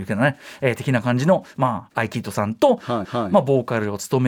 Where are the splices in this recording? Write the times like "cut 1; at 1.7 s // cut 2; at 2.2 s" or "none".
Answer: cut 1; at 1.9 s // cut 2; at 3.0 s